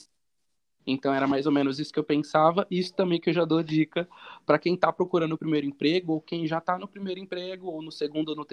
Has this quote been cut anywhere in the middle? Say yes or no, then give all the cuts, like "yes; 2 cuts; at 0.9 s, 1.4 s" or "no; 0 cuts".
no; 0 cuts